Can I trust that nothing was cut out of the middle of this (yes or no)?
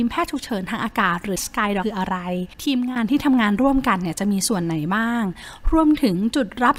no